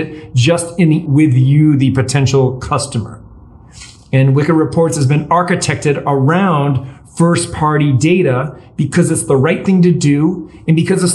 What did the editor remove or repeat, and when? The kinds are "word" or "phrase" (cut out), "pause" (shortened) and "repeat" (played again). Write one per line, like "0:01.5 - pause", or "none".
0:01.1 - word